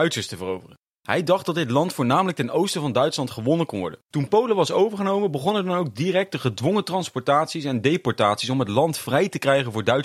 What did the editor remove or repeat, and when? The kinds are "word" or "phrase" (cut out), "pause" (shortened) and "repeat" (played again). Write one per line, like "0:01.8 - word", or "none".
0:04.0 - pause